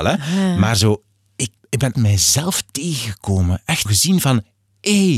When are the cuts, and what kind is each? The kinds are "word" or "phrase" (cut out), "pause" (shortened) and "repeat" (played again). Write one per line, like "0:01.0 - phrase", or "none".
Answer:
0:01.6 - word
0:01.9 - word
0:03.9 - word